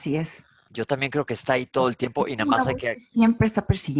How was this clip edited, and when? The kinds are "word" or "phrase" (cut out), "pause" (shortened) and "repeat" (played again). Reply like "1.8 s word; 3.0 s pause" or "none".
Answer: none